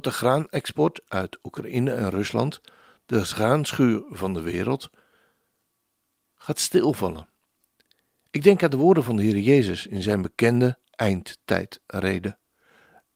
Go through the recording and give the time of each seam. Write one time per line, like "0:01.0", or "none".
none